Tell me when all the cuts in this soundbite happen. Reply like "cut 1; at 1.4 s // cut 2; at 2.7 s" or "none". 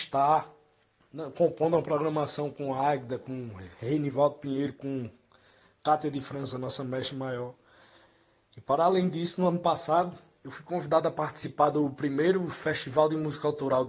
none